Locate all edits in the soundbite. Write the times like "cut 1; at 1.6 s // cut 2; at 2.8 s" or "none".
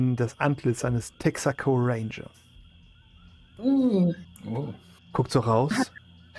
none